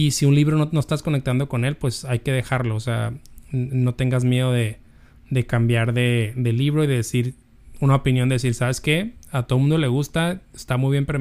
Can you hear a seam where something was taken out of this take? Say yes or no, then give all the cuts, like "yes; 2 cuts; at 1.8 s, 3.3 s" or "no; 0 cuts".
no; 0 cuts